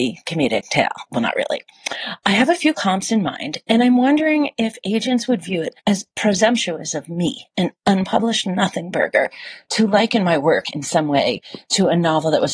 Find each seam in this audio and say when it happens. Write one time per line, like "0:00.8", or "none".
0:01.1
0:05.8